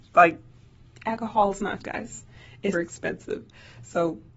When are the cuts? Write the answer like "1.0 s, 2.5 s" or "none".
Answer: 1.8 s, 2.7 s